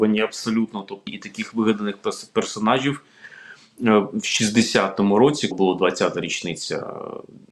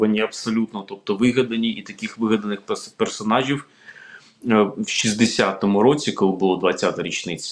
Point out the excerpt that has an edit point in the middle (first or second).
first